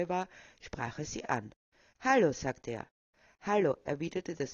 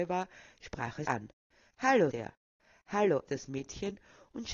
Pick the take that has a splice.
second; 3 cuts; at 1.1 s, 2.1 s, 3.3 s

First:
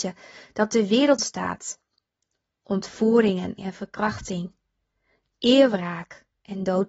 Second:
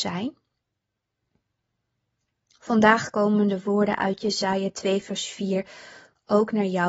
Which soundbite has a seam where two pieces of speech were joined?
first; 2 cuts; at 1.2 s, 3.6 s

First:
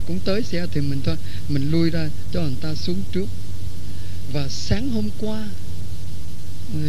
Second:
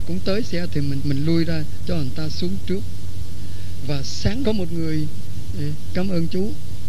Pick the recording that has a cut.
second; 2 cuts; at 1.0 s, 4.4 s

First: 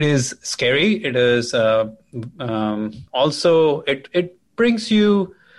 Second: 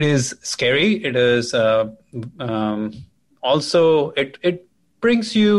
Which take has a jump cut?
first; 2 cuts; at 3.1 s, 4.5 s

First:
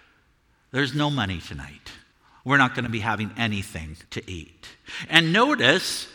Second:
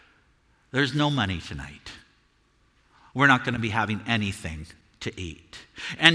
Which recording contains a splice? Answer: first; 2 cuts; at 2.1 s, 4.1 s

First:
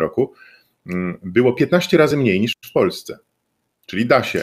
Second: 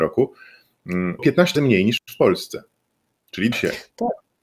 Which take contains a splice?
second; 3 cuts; at 1.2 s, 1.5 s, 3.5 s

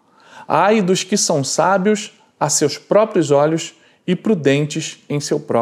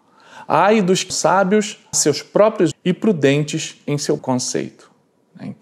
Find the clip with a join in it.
second; 4 cuts; at 1.1 s, 1.9 s, 2.7 s, 4.2 s

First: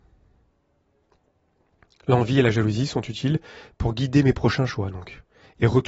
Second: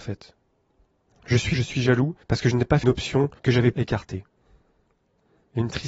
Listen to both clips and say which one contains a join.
second; 5 cuts; at 1.5 s, 2.2 s, 2.8 s, 3.4 s, 3.7 s

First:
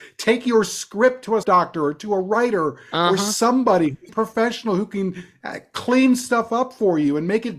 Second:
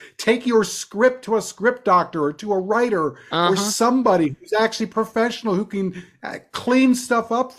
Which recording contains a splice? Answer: first; 2 cuts; at 1.4 s, 4.1 s

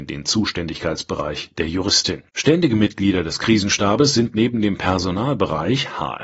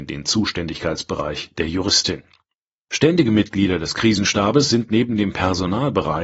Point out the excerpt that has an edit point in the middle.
first; 1 cut; at 2.3 s

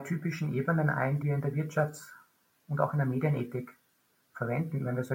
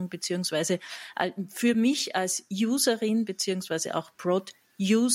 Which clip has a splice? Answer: first; 1 cut; at 1.2 s

